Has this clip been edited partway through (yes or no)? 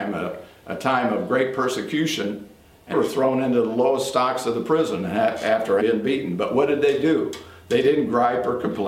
yes